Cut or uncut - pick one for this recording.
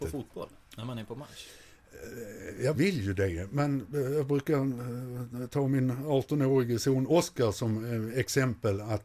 cut